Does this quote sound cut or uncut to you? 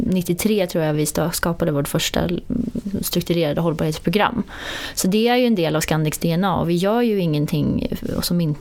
uncut